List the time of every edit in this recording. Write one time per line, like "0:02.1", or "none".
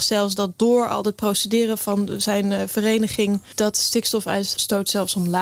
none